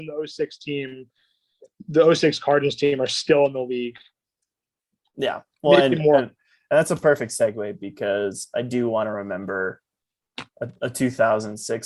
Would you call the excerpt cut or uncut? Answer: uncut